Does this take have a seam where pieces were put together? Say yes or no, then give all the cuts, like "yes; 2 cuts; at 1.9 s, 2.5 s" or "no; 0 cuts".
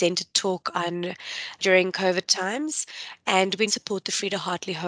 yes; 2 cuts; at 1.6 s, 3.7 s